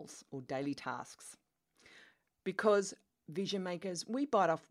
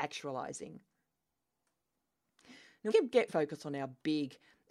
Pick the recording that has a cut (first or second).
second